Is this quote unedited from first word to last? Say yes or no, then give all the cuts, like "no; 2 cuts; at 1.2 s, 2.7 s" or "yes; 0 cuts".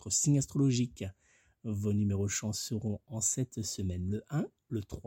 yes; 0 cuts